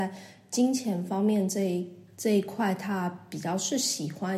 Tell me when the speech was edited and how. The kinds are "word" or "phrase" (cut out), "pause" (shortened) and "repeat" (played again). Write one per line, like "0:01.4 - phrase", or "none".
none